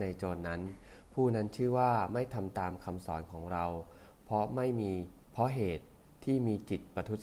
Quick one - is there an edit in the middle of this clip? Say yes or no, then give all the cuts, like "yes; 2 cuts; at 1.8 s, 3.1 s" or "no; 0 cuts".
yes; 1 cut; at 5.2 s